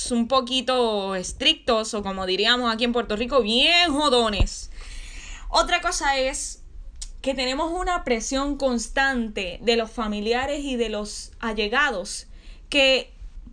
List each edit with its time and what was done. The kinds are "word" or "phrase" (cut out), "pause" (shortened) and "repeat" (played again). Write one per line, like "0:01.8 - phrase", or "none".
none